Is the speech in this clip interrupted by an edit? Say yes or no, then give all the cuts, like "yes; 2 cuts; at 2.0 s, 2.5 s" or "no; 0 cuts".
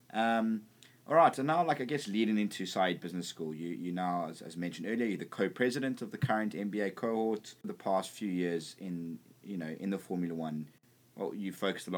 no; 0 cuts